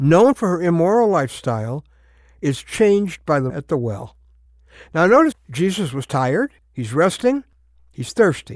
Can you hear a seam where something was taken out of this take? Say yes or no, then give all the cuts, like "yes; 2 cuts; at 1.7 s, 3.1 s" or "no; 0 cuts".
yes; 3 cuts; at 3.5 s, 5.3 s, 6.6 s